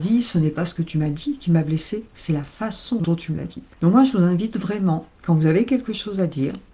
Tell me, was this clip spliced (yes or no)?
no